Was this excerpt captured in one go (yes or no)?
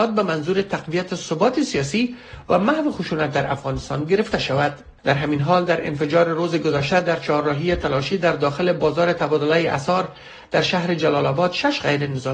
no